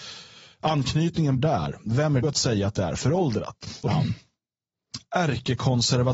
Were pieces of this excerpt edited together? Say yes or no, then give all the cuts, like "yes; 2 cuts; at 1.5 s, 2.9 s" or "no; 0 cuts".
yes; 3 cuts; at 1.4 s, 2.2 s, 3.9 s